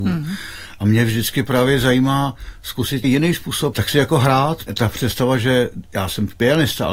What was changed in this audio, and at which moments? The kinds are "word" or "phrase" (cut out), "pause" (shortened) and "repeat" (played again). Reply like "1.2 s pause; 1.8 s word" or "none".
3.0 s word; 3.7 s word; 4.7 s word